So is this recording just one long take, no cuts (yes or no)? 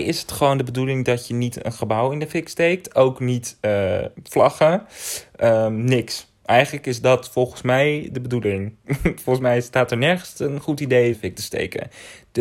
no